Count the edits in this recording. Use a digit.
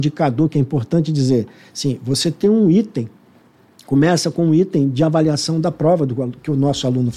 0